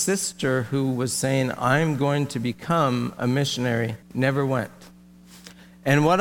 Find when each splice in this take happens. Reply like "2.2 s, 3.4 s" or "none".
4.0 s